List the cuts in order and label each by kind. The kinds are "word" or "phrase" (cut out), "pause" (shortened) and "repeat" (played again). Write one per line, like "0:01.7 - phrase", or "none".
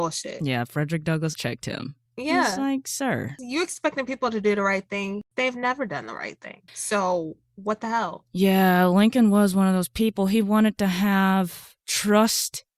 0:01.4 - word
0:02.1 - pause
0:06.7 - pause